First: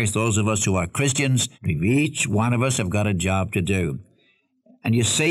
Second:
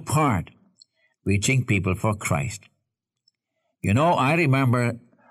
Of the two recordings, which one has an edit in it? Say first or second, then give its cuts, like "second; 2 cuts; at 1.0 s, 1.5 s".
first; 1 cut; at 1.5 s